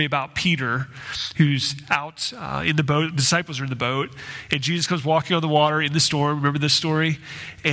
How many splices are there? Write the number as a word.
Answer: zero